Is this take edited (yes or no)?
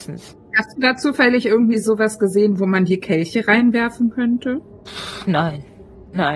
no